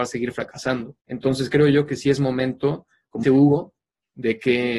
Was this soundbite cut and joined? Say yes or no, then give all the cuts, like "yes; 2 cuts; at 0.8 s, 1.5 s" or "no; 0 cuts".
yes; 2 cuts; at 1.0 s, 3.2 s